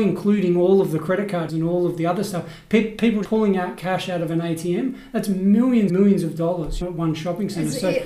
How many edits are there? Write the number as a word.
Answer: four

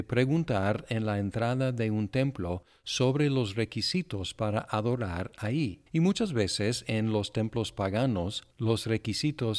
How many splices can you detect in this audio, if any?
one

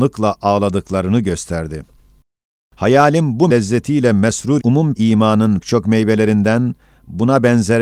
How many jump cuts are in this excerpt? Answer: four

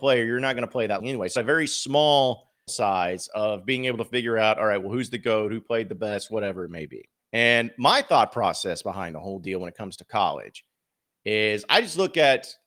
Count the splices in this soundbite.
four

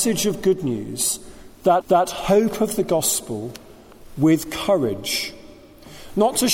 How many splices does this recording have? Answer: one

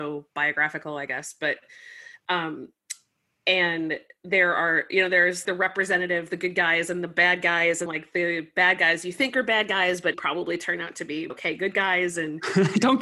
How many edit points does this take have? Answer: four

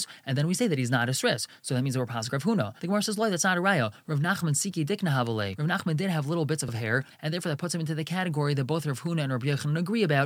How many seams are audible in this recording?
two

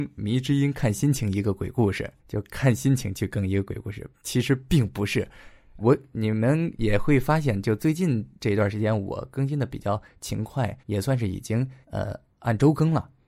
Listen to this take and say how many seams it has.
five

